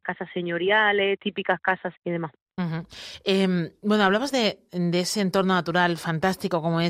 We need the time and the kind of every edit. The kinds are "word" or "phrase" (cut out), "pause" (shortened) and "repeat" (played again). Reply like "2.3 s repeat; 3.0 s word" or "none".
1.9 s phrase